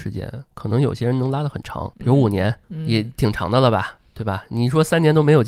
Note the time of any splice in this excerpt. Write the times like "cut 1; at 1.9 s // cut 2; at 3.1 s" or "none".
cut 1; at 1.9 s // cut 2; at 2.6 s